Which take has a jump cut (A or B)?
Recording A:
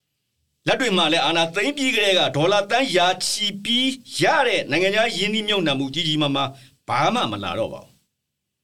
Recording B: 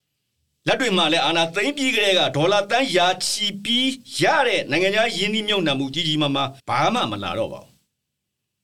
B